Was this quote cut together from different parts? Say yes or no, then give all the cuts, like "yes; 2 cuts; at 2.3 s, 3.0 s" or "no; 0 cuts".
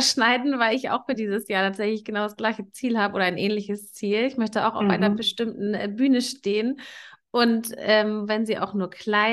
no; 0 cuts